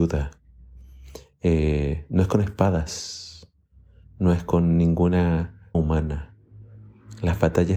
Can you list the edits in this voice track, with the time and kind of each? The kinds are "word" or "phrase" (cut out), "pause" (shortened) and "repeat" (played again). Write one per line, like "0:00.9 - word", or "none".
0:05.7 - word